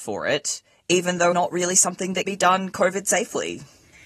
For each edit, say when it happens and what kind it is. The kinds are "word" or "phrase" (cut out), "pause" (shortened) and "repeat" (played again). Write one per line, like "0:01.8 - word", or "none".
0:01.3 - word
0:02.3 - word